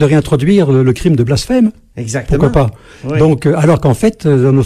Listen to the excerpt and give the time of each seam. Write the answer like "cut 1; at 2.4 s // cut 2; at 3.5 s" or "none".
none